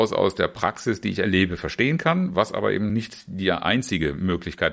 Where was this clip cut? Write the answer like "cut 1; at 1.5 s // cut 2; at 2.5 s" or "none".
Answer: none